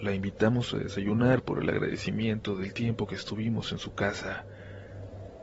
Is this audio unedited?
yes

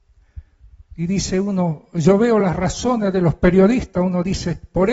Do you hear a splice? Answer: no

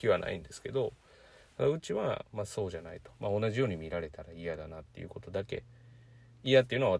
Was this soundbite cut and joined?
no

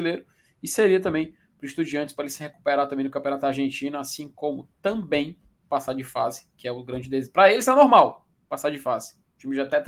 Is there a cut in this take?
no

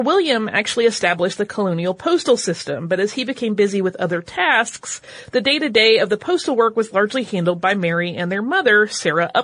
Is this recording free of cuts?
yes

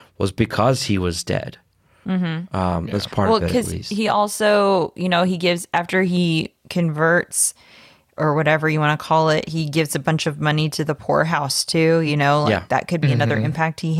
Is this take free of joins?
yes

